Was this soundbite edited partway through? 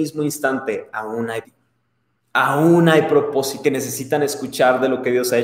yes; 2 cuts; at 1.4 s, 3.6 s

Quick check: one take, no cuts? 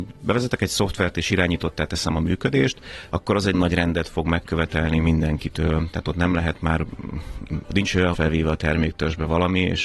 no; 3 cuts; at 3.5 s, 7.6 s, 8.1 s

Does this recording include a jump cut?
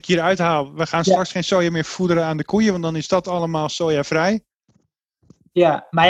no; 0 cuts

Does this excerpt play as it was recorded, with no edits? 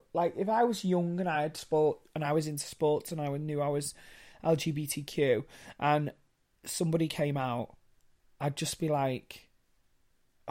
yes; 0 cuts

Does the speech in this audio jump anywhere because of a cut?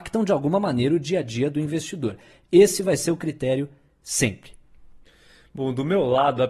no; 0 cuts

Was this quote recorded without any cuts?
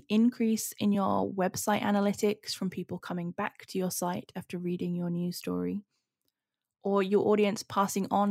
yes; 0 cuts

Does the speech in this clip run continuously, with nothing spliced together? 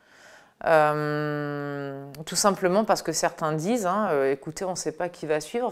yes; 0 cuts

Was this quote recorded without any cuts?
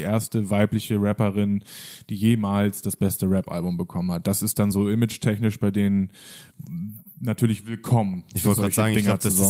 yes; 0 cuts

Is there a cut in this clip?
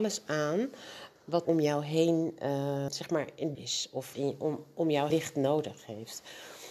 yes; 5 cuts; at 1.5 s, 2.9 s, 3.6 s, 4.1 s, 5.1 s

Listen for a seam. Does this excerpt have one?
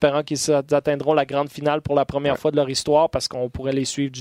no; 0 cuts

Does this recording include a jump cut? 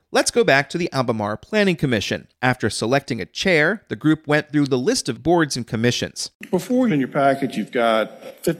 yes; 3 cuts; at 2.3 s, 5.2 s, 6.9 s

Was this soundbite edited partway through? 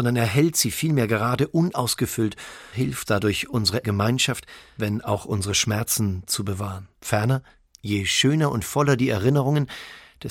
yes; 4 cuts; at 2.7 s, 3.1 s, 3.8 s, 7.0 s

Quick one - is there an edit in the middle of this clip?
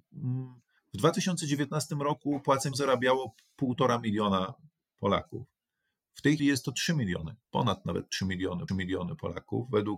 yes; 4 cuts; at 2.7 s, 6.4 s, 7.4 s, 8.7 s

